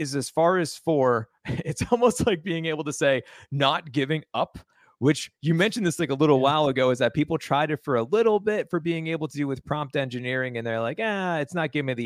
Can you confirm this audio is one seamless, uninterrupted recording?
yes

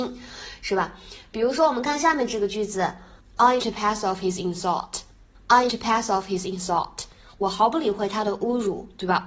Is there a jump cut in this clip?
yes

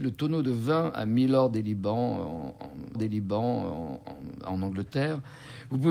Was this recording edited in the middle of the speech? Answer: yes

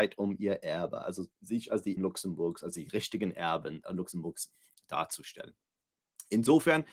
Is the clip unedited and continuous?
no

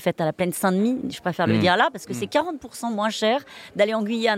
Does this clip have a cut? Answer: no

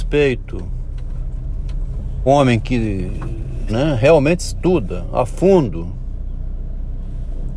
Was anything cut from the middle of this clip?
yes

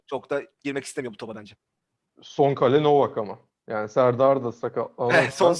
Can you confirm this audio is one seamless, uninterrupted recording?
yes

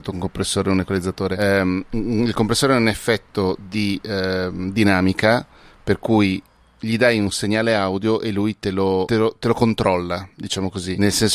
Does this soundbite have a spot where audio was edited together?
no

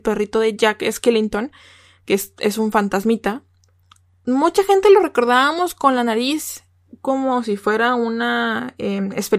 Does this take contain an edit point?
no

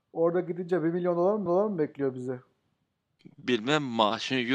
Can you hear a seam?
yes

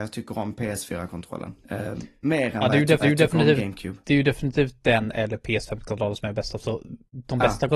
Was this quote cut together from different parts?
yes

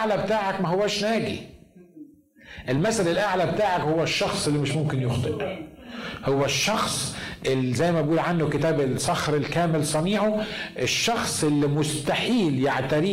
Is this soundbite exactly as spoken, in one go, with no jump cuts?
yes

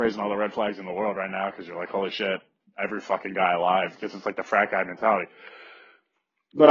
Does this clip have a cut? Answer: no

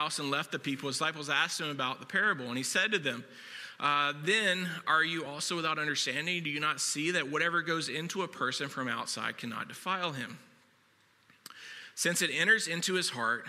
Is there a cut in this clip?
no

